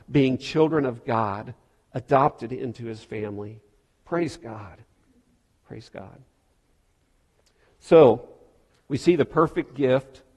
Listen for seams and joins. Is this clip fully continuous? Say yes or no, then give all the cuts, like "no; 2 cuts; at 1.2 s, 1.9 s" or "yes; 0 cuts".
yes; 0 cuts